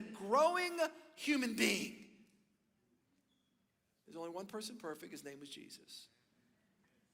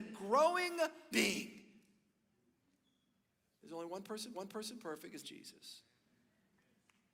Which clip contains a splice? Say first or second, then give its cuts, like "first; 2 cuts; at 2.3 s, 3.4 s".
second; 3 cuts; at 1.1 s, 4.3 s, 5.2 s